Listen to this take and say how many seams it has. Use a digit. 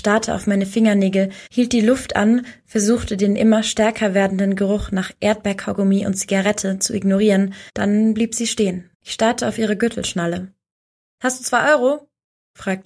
3